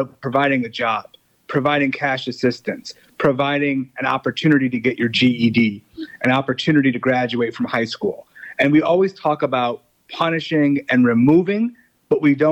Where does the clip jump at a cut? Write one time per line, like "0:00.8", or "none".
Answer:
none